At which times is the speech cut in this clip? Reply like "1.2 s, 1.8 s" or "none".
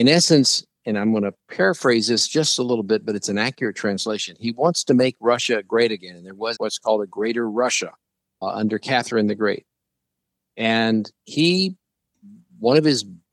6.6 s, 8.4 s